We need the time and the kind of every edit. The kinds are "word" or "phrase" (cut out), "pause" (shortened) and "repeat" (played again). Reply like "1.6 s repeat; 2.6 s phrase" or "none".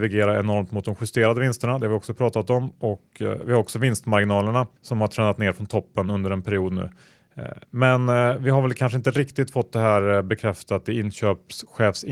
4.8 s pause